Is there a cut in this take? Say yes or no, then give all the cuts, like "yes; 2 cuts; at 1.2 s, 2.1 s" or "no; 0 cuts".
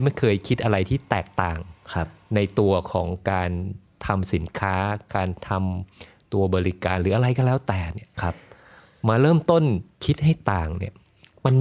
no; 0 cuts